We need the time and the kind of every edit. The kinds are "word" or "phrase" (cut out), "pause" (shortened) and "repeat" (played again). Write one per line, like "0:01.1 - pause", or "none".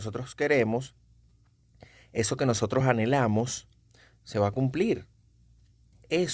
none